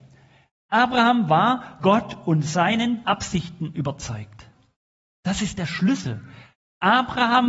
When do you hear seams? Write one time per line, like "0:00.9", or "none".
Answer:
0:01.8
0:03.0